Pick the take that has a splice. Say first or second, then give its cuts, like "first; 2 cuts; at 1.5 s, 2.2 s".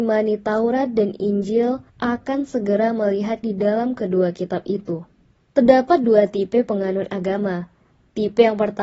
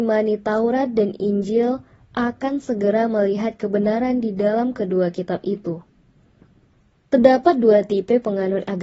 first; 3 cuts; at 1.9 s, 3.4 s, 5.3 s